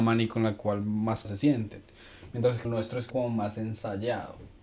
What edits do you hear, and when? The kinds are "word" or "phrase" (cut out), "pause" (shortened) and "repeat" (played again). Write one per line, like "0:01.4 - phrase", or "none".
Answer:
0:01.2 - word
0:02.6 - word
0:03.1 - word

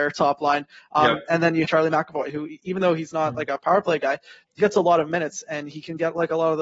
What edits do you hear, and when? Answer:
0:01.6 - word
0:04.6 - word

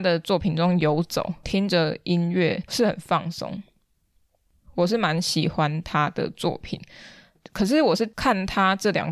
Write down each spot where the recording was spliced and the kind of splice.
none

